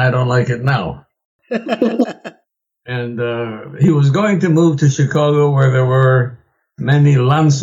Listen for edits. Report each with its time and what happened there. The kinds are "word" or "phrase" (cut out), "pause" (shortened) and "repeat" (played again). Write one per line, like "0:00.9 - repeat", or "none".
none